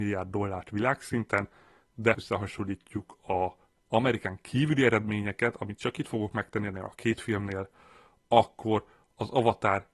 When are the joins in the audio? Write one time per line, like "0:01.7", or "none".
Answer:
0:02.1

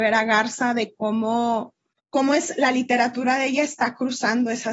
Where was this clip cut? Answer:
0:02.0

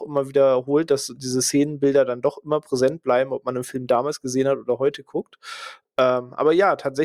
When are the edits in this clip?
none

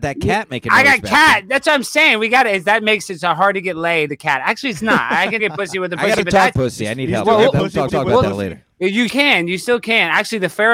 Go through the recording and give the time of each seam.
0:04.1
0:05.4
0:06.5
0:07.9
0:09.1

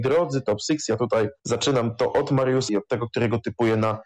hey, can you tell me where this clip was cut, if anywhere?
0:01.4
0:02.7

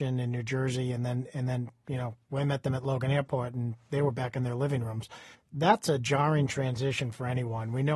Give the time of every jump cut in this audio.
0:05.3

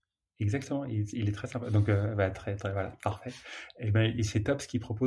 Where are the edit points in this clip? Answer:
none

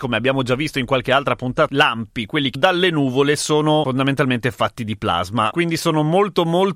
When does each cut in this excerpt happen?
0:01.7
0:02.5

